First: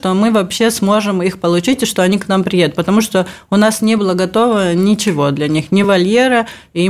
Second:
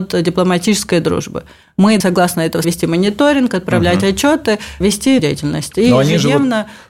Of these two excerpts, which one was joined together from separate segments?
second; 4 cuts; at 2.0 s, 2.6 s, 4.8 s, 5.2 s

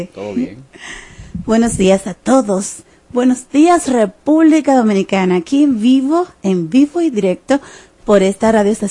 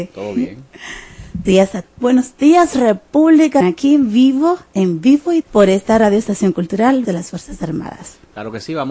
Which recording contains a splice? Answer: second; 5 cuts; at 1.5 s, 1.8 s, 3.6 s, 5.4 s, 7.0 s

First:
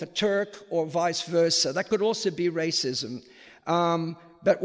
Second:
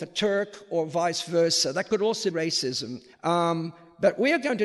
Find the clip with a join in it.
second; 2 cuts; at 2.3 s, 3.1 s

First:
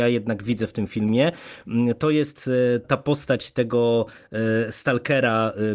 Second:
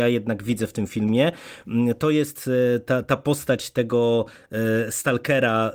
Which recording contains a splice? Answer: first; 1 cut; at 2.8 s

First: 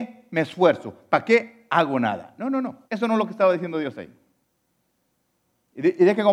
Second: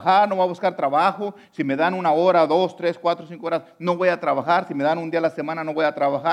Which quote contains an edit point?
first; 1 cut; at 2.8 s

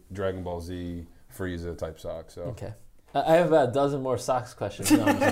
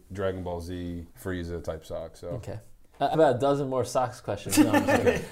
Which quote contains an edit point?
second; 2 cuts; at 1.1 s, 3.1 s

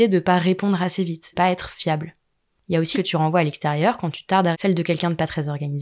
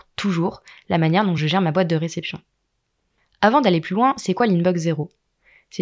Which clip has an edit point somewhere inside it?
first; 3 cuts; at 1.3 s, 2.9 s, 4.5 s

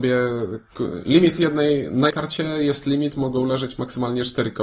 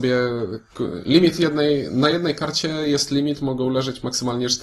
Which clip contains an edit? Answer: first; 1 cut; at 2.1 s

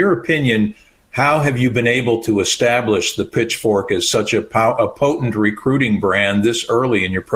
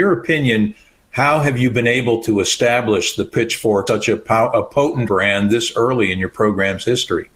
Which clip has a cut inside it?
second; 2 cuts; at 3.9 s, 5.1 s

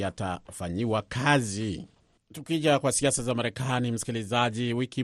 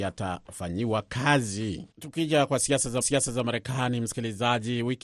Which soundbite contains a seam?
second; 2 cuts; at 1.9 s, 3.0 s

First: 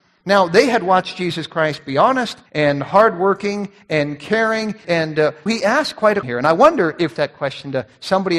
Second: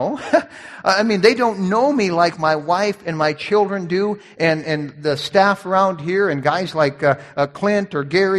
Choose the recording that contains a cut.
first; 5 cuts; at 2.5 s, 4.8 s, 5.5 s, 6.2 s, 7.2 s

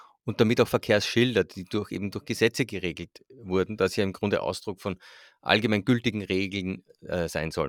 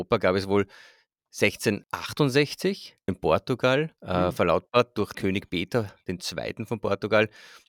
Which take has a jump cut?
second; 2 cuts; at 3.1 s, 5.1 s

